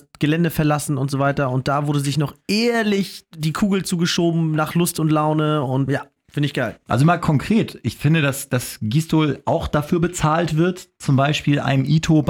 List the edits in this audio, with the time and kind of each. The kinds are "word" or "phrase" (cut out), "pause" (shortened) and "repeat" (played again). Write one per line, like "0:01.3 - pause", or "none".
0:05.9 - word